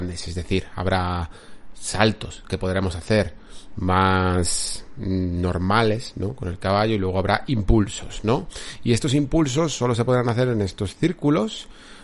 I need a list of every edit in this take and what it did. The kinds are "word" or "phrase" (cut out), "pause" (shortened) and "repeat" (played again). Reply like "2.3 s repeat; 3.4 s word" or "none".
none